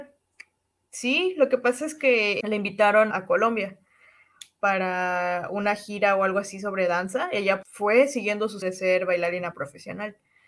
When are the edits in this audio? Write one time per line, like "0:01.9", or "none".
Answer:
0:02.4
0:03.1
0:07.6
0:08.6